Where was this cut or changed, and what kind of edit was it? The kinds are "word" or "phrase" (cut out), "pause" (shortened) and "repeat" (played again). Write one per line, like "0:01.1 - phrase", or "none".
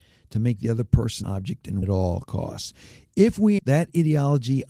0:01.2 - word
0:01.8 - word
0:03.6 - word